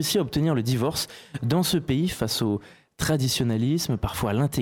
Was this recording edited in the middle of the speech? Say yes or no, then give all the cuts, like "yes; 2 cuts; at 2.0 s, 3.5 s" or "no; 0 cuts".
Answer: no; 0 cuts